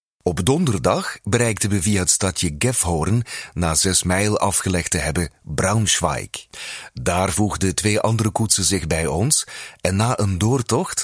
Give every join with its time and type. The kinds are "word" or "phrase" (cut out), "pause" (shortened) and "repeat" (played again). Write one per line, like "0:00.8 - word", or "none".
none